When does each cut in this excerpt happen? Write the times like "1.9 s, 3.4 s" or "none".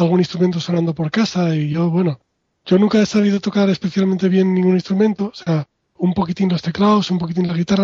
none